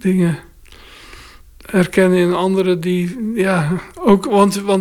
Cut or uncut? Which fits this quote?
uncut